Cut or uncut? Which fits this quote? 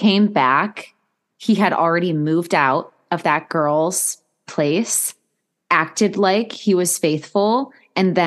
uncut